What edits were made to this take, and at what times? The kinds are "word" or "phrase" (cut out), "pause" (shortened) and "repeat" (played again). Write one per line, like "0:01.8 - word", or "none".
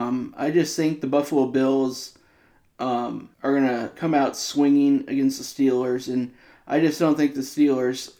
0:03.3 - pause